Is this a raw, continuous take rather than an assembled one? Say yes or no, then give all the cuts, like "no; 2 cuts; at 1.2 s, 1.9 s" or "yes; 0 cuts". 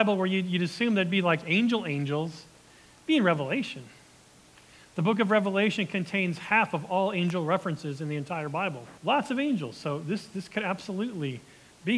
no; 1 cut; at 9.0 s